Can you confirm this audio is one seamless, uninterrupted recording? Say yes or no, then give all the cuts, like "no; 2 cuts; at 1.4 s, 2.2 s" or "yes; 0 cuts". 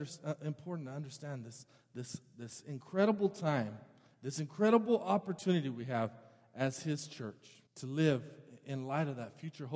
no; 1 cut; at 7.7 s